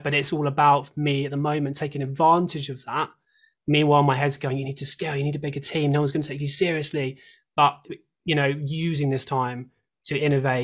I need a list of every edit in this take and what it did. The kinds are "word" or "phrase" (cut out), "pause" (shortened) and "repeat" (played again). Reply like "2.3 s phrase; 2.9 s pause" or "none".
none